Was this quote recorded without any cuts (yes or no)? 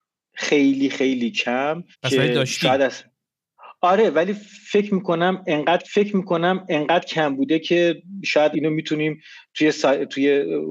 no